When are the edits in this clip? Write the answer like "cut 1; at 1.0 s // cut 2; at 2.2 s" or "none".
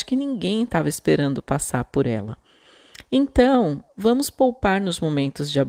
none